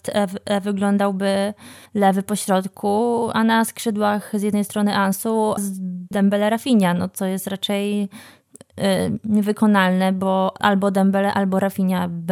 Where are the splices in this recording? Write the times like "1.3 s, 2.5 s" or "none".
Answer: 1.9 s, 5.6 s, 6.1 s